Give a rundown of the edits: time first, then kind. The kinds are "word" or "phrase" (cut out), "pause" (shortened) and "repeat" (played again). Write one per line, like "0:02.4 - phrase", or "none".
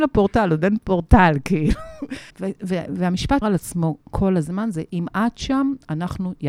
0:02.3 - pause
0:02.9 - word
0:03.4 - word
0:04.0 - pause